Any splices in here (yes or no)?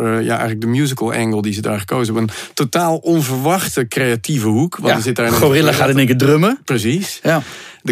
no